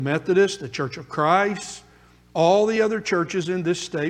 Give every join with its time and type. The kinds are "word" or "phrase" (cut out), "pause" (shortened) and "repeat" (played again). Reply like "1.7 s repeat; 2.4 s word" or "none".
none

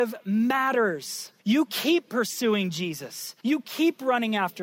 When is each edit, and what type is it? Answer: 1.4 s pause; 3.4 s pause

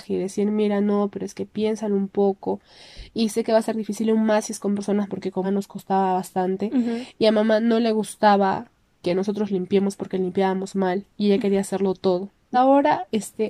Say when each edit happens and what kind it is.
5.1 s word; 5.4 s word; 12.5 s word

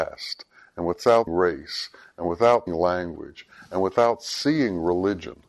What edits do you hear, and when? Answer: 1.3 s word; 2.7 s word

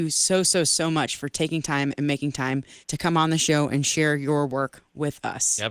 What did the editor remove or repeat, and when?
2.8 s pause

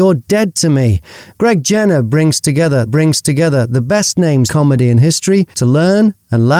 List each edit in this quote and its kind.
2.9 s repeat; 4.5 s word; 5.5 s pause

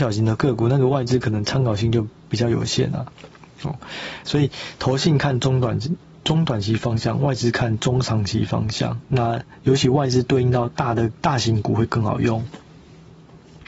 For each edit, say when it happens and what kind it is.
9.0 s pause

